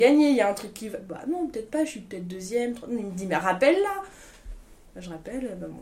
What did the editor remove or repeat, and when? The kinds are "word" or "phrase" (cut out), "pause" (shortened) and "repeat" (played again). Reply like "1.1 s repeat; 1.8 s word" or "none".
none